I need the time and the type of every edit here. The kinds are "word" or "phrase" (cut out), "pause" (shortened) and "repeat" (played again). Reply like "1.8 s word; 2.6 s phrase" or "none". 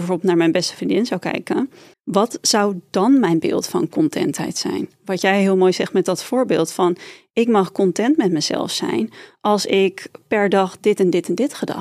1.9 s pause